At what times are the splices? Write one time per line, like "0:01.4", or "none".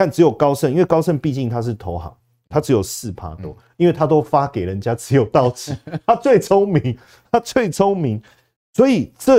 none